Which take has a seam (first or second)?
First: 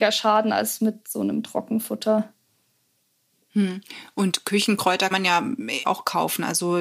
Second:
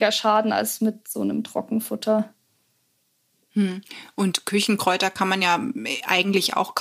first